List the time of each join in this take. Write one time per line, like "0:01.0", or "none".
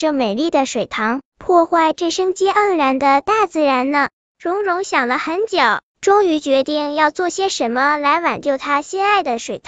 0:04.1